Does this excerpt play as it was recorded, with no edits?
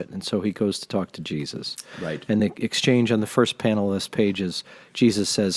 yes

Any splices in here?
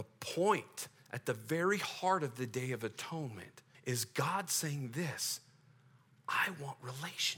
yes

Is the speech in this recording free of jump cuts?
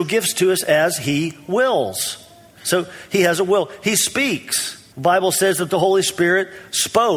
no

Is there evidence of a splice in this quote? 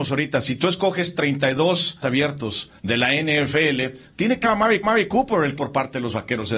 yes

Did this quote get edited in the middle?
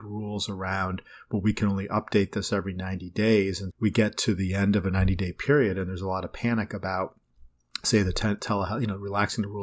yes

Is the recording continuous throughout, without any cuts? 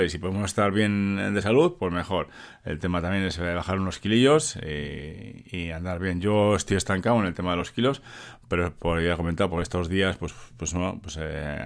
yes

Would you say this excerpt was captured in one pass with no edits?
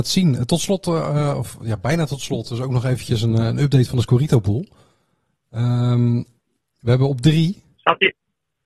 yes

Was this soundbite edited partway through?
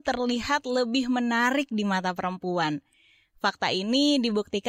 no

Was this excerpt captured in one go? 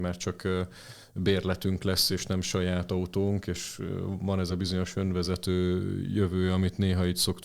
yes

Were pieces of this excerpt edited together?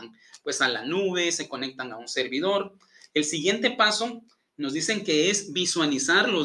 no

